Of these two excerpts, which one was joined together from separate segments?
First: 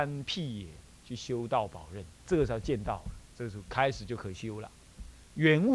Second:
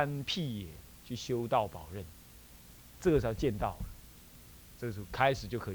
first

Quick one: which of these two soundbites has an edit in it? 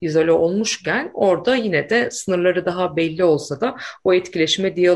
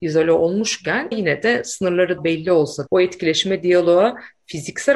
second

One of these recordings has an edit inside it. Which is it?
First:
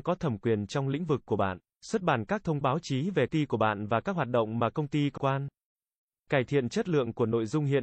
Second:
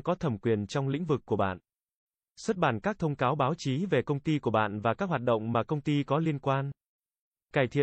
first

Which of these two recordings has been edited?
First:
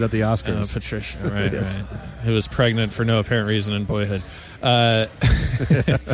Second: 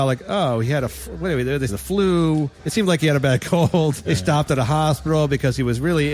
second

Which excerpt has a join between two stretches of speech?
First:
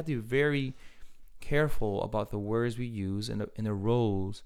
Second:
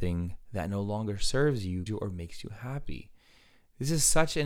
second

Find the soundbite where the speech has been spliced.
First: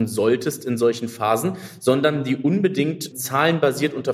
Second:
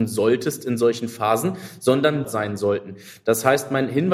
second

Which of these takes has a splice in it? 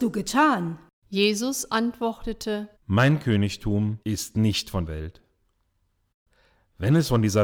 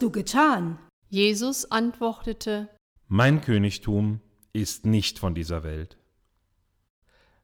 first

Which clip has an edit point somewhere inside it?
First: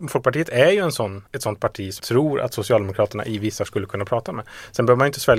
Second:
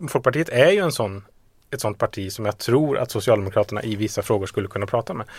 first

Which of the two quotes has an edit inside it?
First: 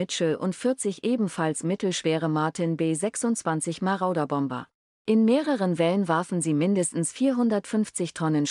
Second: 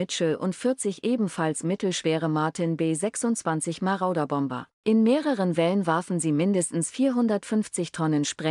second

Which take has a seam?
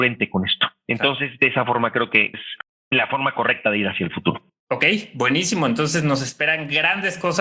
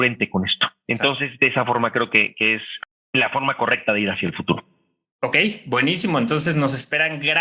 first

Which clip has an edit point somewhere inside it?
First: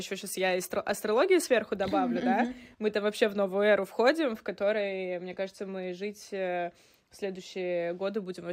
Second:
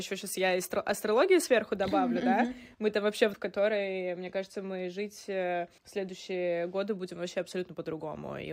second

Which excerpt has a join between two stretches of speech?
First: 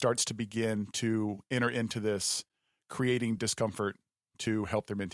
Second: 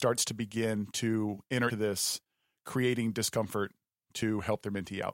second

